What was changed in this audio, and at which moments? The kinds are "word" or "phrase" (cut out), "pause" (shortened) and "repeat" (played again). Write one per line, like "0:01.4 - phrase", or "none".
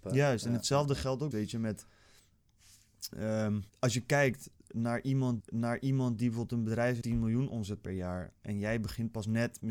0:01.3 - phrase
0:03.7 - pause
0:05.4 - repeat
0:07.0 - word